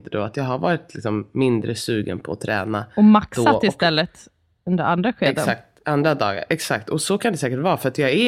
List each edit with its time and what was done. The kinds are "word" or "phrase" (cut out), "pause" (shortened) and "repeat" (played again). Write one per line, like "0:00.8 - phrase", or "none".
none